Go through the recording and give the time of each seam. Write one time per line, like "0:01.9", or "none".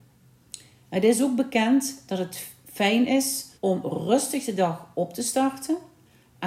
0:03.5